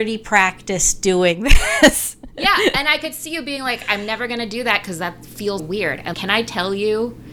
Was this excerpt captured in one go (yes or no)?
no